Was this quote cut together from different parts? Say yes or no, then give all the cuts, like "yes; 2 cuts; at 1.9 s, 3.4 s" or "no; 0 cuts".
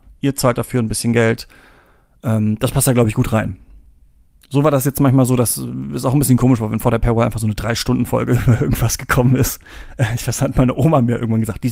no; 0 cuts